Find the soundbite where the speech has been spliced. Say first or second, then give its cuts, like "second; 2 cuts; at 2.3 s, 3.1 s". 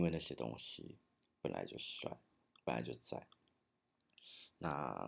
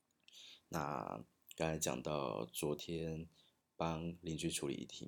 second; 1 cut; at 3.6 s